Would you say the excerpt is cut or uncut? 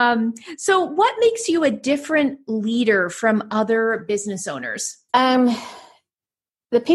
cut